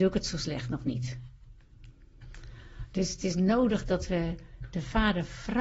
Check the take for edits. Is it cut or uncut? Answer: uncut